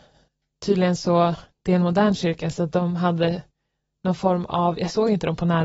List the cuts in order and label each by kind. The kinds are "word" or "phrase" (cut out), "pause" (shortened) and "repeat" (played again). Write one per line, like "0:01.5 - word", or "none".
none